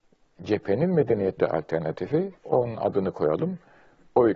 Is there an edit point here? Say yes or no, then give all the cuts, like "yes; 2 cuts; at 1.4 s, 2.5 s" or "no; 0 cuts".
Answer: yes; 2 cuts; at 1.4 s, 2.4 s